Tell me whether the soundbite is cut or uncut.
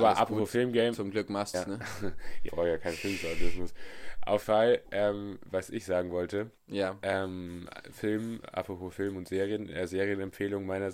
cut